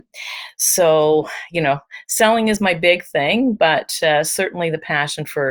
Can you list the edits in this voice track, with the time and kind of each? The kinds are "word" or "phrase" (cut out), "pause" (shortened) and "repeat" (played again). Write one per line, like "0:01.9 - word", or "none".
none